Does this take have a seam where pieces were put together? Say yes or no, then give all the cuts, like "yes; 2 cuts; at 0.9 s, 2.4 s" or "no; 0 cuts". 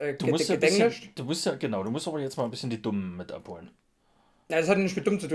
no; 0 cuts